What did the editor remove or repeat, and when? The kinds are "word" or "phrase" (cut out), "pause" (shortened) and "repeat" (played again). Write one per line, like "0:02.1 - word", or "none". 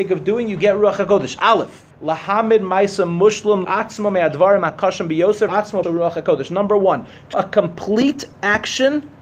0:01.9 - pause
0:03.6 - phrase
0:05.5 - word
0:05.8 - word
0:07.3 - word